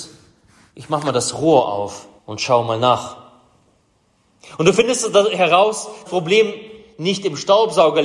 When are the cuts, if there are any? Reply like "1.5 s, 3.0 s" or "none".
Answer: 2.2 s, 6.1 s